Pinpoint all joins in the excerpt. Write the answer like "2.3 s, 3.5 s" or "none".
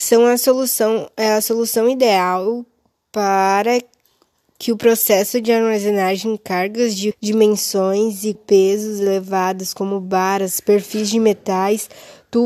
7.1 s, 8.3 s